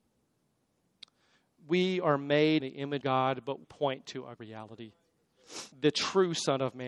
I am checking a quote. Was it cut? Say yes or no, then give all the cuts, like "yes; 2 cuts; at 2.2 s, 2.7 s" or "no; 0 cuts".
yes; 5 cuts; at 2.6 s, 3.0 s, 3.6 s, 4.4 s, 5.7 s